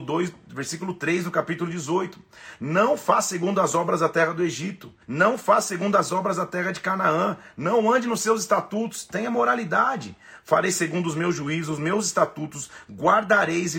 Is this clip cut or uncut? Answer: cut